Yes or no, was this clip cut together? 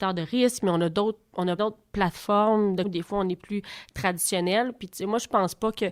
yes